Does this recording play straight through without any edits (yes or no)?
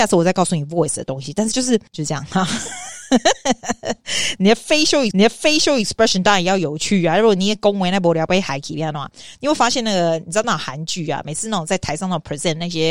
no